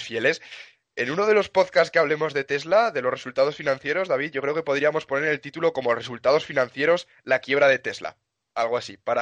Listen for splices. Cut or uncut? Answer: uncut